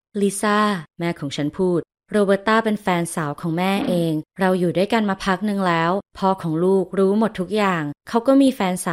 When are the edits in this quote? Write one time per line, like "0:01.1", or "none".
none